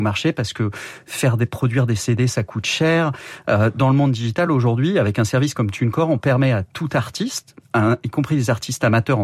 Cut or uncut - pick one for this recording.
uncut